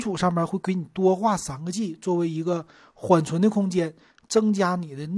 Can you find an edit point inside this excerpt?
no; 0 cuts

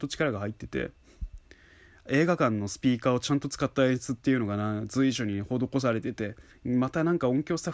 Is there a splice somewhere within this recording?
no; 0 cuts

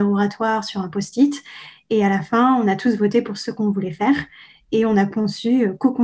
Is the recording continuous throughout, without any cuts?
yes; 0 cuts

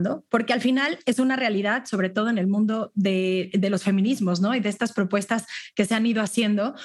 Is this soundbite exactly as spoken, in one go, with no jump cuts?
yes; 0 cuts

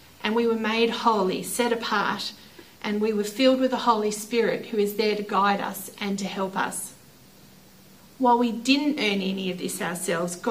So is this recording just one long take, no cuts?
yes; 0 cuts

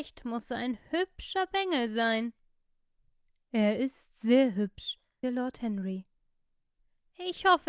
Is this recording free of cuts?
no; 1 cut; at 5.2 s

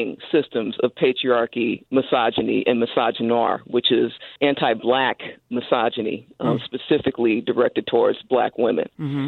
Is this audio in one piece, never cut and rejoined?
no; 1 cut; at 4.4 s

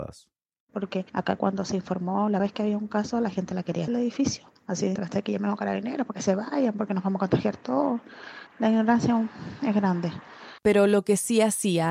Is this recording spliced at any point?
yes; 6 cuts; at 2.4 s, 3.9 s, 4.6 s, 5.0 s, 8.5 s, 10.6 s

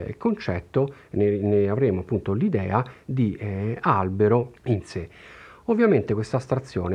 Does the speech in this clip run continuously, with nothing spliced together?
no; 1 cut; at 4.6 s

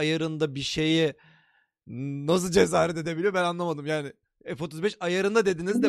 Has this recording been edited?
no; 0 cuts

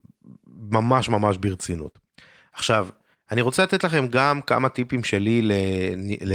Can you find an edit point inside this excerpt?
no; 0 cuts

